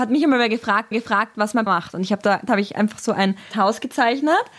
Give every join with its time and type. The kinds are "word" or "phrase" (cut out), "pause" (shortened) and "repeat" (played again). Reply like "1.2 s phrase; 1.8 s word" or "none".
0.9 s repeat; 1.7 s word; 2.5 s word; 3.5 s word